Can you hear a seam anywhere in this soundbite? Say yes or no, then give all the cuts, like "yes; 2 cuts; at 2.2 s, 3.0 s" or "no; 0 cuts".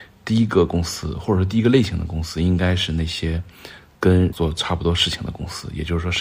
yes; 1 cut; at 4.3 s